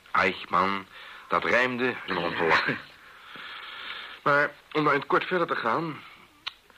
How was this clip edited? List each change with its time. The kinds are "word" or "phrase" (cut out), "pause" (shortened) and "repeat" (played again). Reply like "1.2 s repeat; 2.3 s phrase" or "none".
2.1 s phrase; 4.6 s pause